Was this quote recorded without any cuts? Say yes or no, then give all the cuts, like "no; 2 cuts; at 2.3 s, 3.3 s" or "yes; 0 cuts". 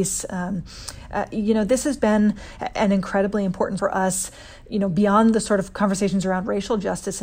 no; 2 cuts; at 2.0 s, 3.8 s